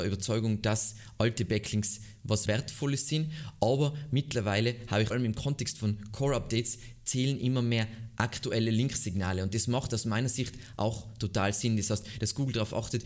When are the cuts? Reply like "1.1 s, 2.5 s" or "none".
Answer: 2.5 s, 5.1 s